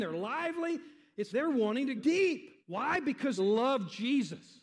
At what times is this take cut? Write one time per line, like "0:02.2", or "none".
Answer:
0:01.3
0:02.0
0:02.6
0:03.4